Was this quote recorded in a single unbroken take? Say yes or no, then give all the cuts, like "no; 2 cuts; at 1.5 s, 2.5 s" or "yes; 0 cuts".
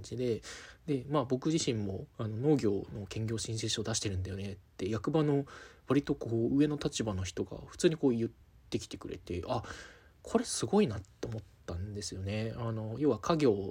yes; 0 cuts